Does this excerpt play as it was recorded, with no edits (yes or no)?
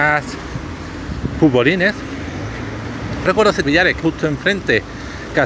no